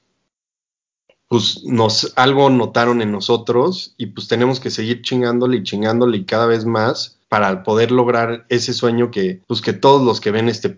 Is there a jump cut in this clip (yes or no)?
yes